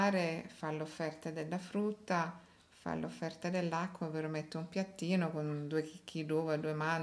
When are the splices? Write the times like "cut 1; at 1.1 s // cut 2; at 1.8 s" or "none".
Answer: none